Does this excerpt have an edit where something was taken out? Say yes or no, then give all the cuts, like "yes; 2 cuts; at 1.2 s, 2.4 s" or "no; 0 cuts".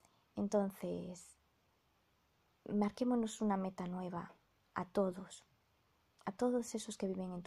no; 0 cuts